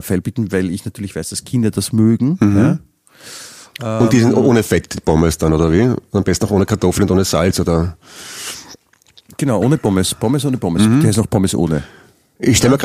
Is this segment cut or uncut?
uncut